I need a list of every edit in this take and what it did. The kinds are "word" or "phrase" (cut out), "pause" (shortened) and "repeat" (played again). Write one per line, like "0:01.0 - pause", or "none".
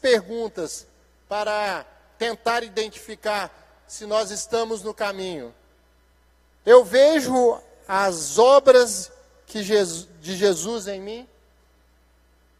0:06.1 - pause